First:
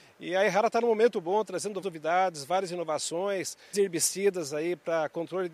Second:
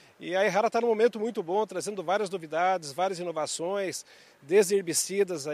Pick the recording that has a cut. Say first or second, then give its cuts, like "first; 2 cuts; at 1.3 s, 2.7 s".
first; 3 cuts; at 1.1 s, 1.8 s, 3.7 s